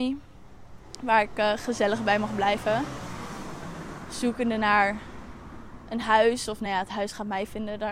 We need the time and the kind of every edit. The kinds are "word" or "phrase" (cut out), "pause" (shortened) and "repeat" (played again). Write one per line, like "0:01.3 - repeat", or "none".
none